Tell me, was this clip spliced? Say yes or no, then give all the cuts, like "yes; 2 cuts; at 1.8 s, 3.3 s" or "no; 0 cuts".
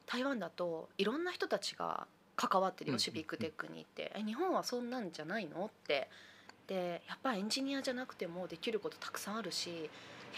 no; 0 cuts